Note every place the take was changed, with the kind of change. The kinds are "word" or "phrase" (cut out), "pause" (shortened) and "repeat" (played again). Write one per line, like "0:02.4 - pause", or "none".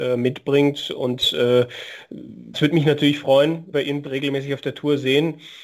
0:02.5 - word
0:03.7 - word
0:04.0 - word